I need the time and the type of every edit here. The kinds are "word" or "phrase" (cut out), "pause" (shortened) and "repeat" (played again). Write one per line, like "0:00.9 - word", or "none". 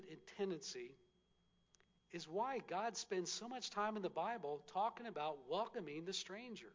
none